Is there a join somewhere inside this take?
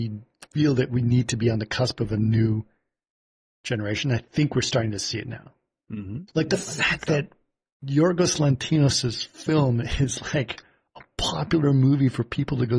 no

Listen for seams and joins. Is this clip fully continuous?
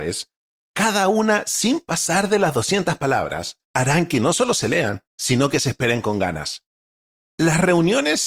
no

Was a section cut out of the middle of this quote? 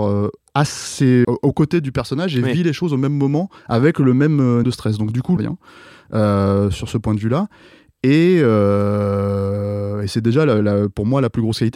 yes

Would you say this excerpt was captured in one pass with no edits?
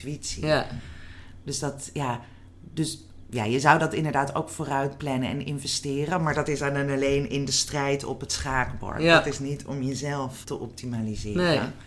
no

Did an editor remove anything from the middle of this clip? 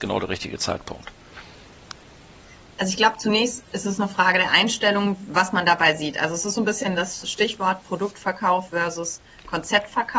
no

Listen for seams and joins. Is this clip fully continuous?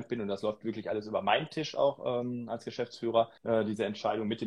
no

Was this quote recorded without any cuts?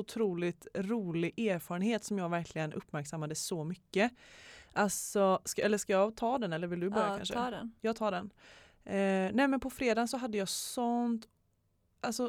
yes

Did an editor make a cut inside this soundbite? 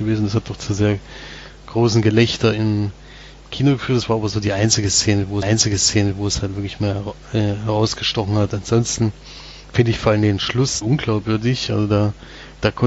yes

